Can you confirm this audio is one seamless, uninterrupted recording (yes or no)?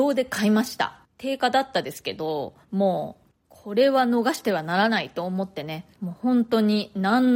no